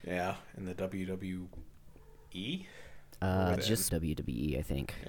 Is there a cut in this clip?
yes; 2 cuts; at 3.6 s, 3.9 s

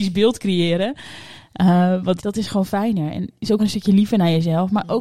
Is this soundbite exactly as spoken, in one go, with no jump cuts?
no; 3 cuts; at 2.2 s, 2.7 s, 3.6 s

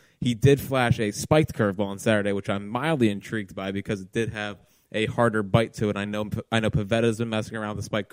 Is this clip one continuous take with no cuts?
yes; 0 cuts

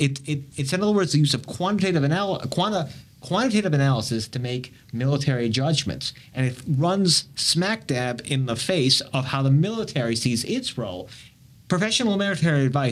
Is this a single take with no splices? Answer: yes; 0 cuts

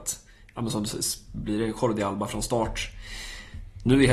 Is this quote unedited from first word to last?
yes; 0 cuts

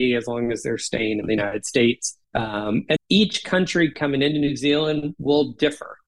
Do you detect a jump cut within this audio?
yes; 2 cuts; at 2.2 s, 3.0 s

